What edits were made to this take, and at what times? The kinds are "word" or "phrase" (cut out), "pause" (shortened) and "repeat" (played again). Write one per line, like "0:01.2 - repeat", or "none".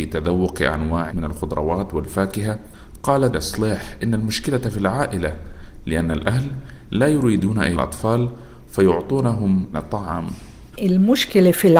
0:01.1 - word
0:03.3 - word
0:07.7 - word
0:09.7 - phrase